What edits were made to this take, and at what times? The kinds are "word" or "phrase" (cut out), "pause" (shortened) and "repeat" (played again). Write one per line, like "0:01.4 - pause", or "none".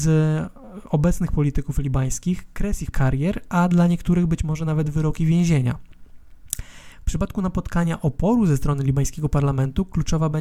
0:02.9 - word